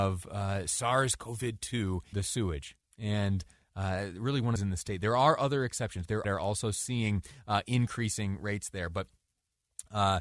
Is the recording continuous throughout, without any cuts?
no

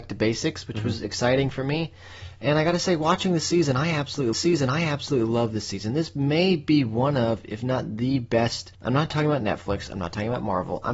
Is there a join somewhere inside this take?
yes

